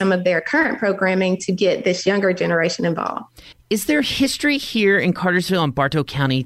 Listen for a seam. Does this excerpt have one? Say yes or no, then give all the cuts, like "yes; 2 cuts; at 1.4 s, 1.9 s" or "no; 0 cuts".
no; 0 cuts